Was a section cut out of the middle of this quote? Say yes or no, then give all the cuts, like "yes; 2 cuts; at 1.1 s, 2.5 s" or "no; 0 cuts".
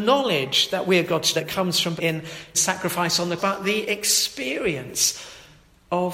yes; 4 cuts; at 1.3 s, 2.0 s, 2.5 s, 3.4 s